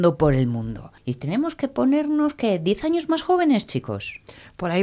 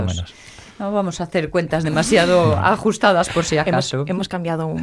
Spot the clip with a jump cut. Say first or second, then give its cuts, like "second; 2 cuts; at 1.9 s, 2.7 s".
first; 1 cut; at 1.0 s